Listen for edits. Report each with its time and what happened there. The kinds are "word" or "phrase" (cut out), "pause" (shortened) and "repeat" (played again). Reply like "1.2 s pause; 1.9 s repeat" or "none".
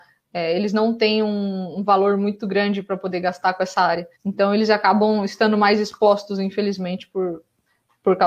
4.1 s pause